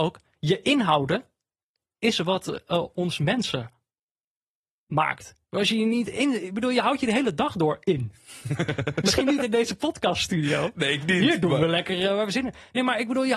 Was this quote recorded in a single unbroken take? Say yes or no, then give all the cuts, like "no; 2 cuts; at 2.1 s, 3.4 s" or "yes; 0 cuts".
yes; 0 cuts